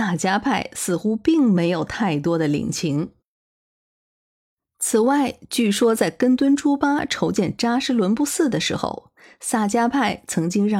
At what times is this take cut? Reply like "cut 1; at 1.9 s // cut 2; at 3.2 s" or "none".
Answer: none